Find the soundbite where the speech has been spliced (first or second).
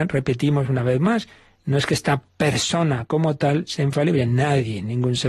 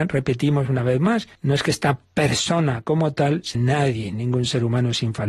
second